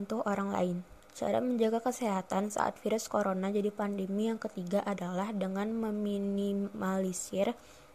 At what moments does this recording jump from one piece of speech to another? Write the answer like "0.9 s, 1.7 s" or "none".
none